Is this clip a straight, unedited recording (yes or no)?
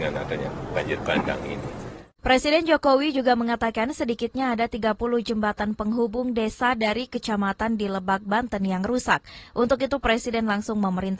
yes